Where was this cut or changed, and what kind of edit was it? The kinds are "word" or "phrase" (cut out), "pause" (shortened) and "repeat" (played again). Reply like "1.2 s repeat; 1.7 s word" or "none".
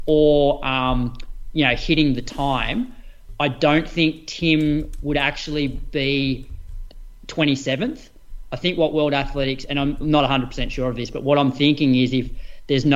none